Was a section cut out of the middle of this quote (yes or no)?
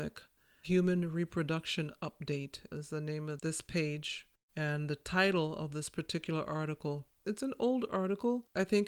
yes